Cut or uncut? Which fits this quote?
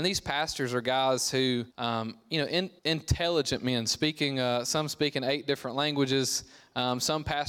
cut